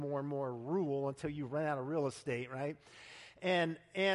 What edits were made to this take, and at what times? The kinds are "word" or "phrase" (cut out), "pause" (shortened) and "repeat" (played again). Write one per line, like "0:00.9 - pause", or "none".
none